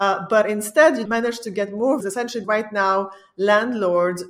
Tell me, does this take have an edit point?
yes; 3 cuts; at 1.1 s, 2.0 s, 2.4 s

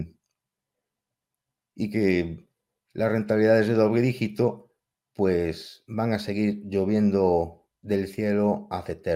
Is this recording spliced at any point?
no; 0 cuts

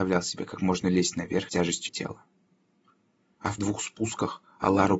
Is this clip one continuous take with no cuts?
no; 3 cuts; at 1.5 s, 1.9 s, 3.6 s

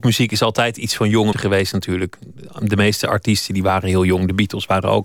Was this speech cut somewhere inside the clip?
yes; 1 cut; at 1.3 s

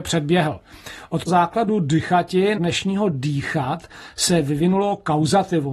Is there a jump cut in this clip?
yes; 2 cuts; at 1.3 s, 2.6 s

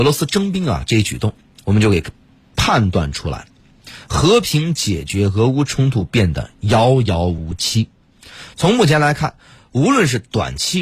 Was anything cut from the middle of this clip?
no; 0 cuts

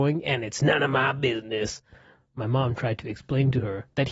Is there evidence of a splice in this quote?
no; 0 cuts

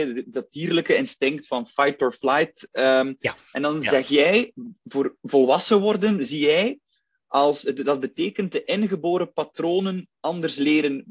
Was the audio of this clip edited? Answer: no; 0 cuts

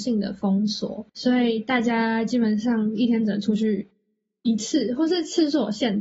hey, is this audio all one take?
no; 1 cut; at 1.1 s

